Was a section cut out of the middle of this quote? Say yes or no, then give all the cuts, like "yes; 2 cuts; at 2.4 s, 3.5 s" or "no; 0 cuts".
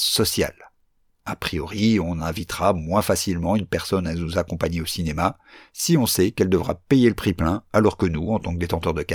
no; 0 cuts